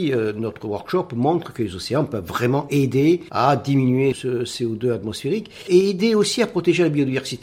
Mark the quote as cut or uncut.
uncut